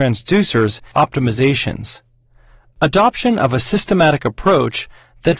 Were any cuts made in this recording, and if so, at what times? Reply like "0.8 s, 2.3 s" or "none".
0.9 s